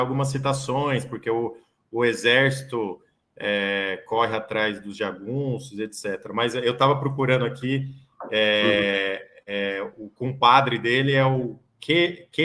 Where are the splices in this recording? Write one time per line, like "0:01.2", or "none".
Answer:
none